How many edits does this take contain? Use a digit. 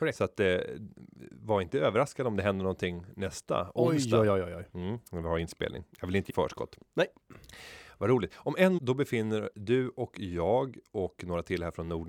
3